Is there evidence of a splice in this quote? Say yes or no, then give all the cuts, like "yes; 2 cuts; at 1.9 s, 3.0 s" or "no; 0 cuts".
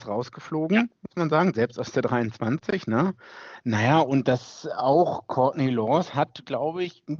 no; 0 cuts